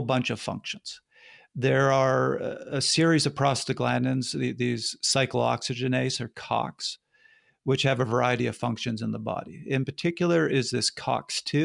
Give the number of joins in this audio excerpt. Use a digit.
0